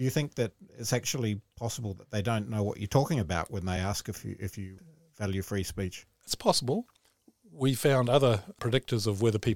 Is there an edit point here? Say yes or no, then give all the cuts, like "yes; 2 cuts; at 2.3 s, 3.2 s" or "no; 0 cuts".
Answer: no; 0 cuts